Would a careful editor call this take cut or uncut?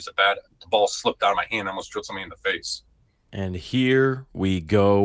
uncut